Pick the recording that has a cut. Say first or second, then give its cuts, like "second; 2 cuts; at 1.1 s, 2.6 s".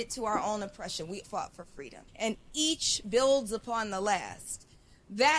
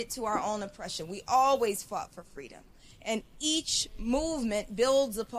first; 3 cuts; at 1.2 s, 2.1 s, 3.0 s